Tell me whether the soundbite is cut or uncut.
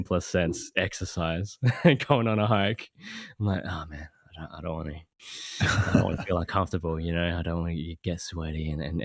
uncut